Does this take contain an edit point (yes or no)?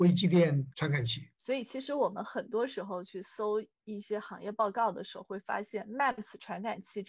no